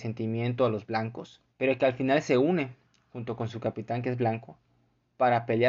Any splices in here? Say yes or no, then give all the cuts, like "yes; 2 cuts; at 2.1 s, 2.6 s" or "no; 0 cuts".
yes; 2 cuts; at 1.5 s, 2.8 s